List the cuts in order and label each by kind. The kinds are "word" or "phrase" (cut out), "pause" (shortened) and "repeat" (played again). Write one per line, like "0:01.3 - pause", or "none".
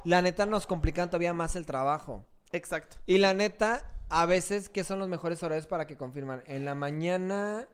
none